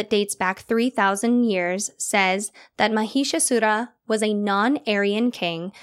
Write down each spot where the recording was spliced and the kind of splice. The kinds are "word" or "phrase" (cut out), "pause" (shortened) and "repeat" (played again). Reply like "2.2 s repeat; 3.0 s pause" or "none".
none